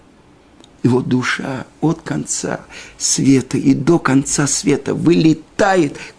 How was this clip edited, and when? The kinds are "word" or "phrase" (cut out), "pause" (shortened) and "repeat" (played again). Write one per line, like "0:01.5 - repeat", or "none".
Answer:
none